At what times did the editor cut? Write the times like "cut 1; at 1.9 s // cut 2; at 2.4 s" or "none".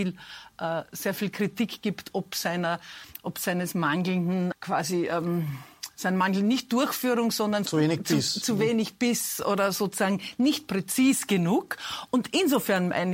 cut 1; at 4.5 s // cut 2; at 7.7 s